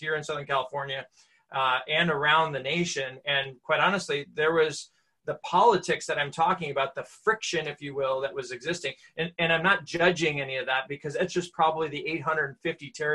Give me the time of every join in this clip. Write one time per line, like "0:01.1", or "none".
0:03.2

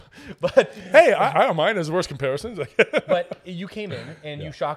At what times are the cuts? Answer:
none

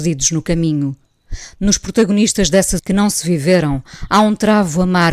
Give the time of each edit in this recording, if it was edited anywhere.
0:02.8

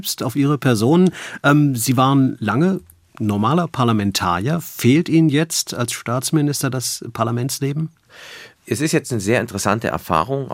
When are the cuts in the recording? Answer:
none

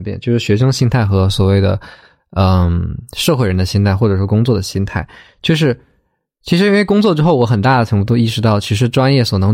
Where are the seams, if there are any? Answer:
none

